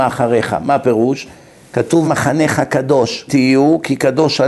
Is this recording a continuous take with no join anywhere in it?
no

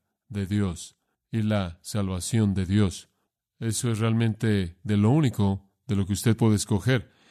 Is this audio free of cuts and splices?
yes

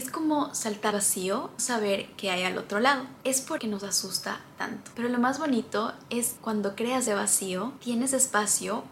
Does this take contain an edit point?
yes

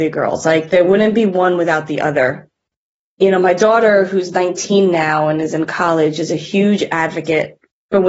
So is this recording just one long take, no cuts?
yes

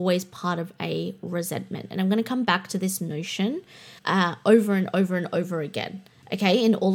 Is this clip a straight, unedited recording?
no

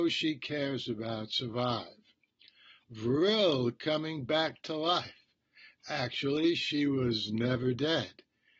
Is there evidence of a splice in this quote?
no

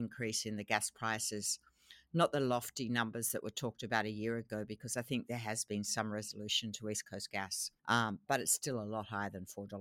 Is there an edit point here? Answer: yes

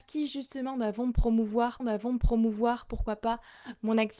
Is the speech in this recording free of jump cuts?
no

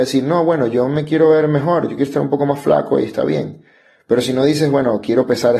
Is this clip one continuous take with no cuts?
yes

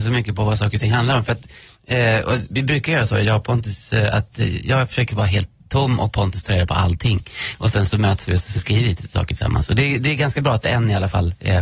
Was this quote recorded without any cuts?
no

